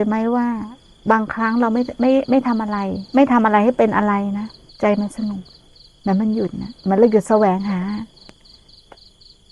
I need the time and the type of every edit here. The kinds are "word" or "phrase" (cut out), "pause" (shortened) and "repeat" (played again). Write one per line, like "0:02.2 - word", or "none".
0:03.1 - pause
0:04.7 - pause
0:05.7 - pause
0:06.8 - pause